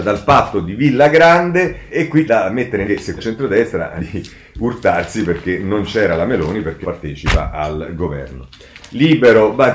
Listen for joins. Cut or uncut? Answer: cut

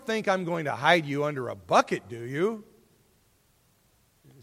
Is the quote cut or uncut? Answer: uncut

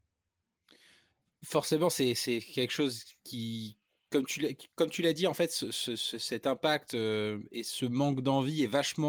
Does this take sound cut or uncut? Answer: cut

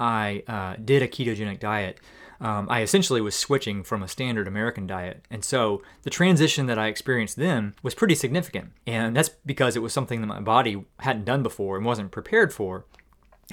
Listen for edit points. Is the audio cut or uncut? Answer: cut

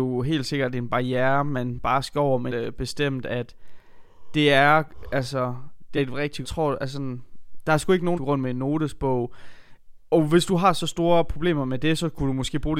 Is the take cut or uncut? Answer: cut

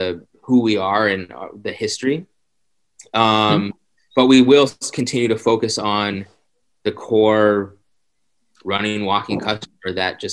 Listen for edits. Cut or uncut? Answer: uncut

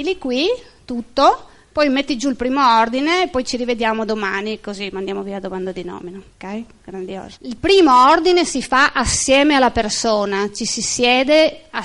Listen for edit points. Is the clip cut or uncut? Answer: cut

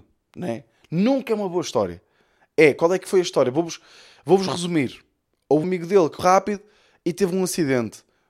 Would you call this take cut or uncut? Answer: cut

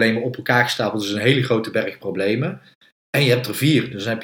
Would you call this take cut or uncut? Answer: uncut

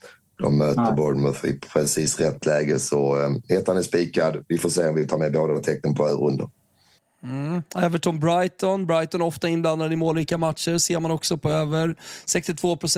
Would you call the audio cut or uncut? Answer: uncut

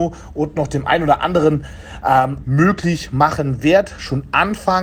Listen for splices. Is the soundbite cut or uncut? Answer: cut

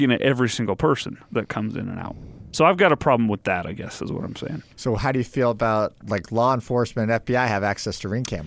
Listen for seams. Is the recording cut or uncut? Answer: cut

